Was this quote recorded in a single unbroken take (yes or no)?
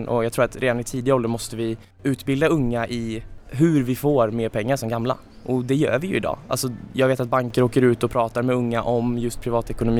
yes